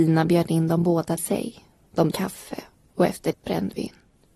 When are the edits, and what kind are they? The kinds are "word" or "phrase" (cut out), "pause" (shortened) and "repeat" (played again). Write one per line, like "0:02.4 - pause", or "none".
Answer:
0:01.2 - word
0:02.1 - word
0:03.3 - word